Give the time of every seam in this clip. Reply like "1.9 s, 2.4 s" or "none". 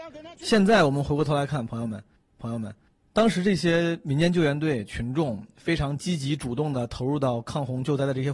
2.4 s

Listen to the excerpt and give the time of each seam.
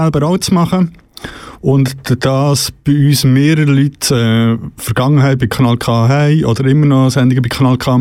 none

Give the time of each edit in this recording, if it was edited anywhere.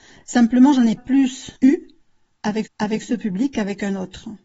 1.0 s, 1.5 s, 2.6 s

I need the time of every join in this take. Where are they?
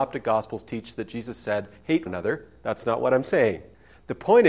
2.1 s

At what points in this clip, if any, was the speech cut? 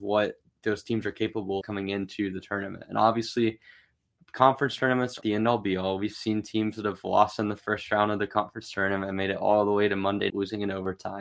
1.6 s, 5.2 s, 10.3 s

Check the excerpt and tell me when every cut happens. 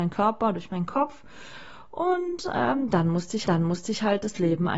3.4 s

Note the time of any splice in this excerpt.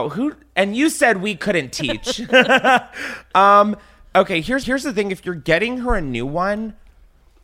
4.6 s

